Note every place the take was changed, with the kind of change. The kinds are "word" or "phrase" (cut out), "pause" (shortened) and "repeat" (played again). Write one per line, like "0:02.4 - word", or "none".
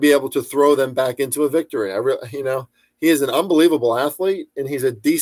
none